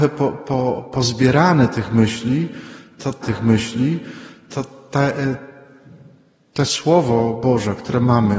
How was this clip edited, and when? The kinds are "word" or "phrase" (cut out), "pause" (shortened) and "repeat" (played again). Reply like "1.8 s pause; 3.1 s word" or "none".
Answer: 3.2 s repeat